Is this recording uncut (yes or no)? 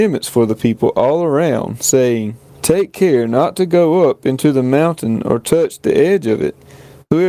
yes